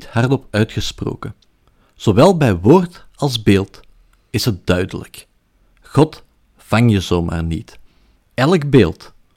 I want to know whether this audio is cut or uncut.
uncut